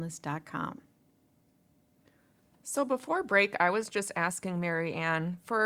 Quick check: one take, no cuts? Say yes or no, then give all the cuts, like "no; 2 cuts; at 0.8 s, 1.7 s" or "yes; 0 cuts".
yes; 0 cuts